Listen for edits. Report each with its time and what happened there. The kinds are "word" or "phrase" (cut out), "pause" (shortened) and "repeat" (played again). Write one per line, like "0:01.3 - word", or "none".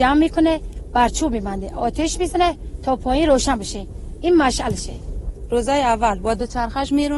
none